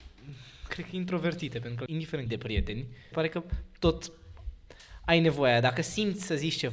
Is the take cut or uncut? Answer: cut